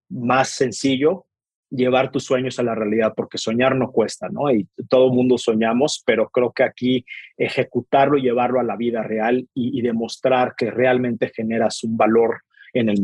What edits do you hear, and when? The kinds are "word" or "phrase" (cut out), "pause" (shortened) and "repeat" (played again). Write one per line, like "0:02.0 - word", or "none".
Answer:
none